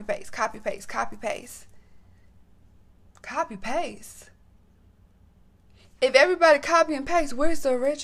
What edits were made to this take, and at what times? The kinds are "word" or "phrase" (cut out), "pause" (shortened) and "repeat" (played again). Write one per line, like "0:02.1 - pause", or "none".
none